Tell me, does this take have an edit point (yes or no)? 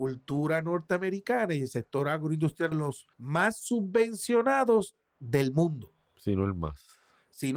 yes